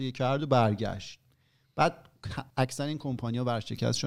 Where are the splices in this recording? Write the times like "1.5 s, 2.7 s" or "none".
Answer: 2.5 s